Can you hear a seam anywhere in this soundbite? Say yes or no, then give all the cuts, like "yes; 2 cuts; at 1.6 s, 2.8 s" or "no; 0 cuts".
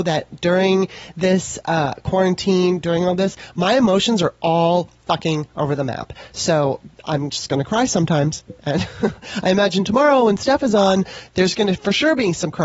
no; 0 cuts